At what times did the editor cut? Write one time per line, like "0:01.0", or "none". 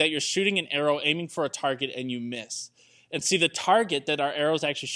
none